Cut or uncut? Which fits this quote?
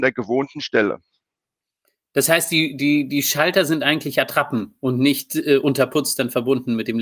uncut